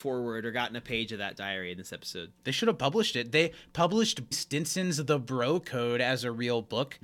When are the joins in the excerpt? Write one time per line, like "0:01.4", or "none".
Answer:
0:04.3